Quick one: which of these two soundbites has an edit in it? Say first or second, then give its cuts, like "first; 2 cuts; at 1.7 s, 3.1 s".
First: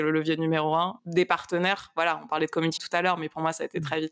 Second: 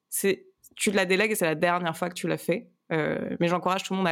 first; 2 cuts; at 1.0 s, 2.8 s